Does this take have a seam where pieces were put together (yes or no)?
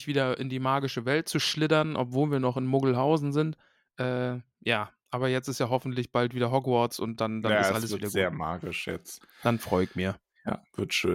no